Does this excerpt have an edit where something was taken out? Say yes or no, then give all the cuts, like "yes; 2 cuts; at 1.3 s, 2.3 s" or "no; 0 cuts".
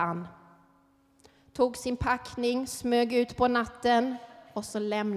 no; 0 cuts